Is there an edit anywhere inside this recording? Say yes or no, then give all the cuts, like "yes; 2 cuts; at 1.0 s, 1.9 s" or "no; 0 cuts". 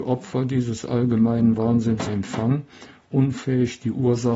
yes; 1 cut; at 2.1 s